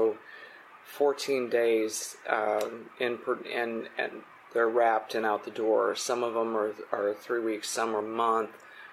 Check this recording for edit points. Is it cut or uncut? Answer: uncut